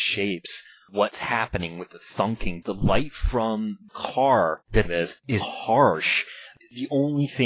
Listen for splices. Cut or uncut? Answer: cut